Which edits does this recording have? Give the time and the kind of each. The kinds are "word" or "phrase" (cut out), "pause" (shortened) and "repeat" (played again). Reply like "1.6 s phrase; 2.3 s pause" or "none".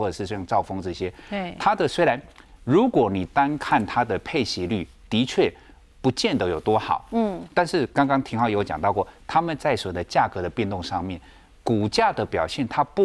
none